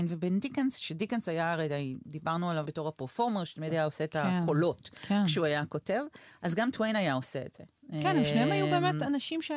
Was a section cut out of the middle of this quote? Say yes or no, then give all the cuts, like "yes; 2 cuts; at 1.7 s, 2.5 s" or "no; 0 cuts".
yes; 1 cut; at 2.7 s